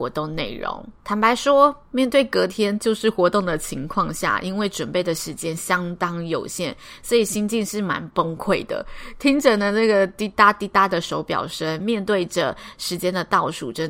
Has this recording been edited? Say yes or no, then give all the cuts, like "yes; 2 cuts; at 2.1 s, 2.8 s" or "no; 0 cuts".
yes; 1 cut; at 1.0 s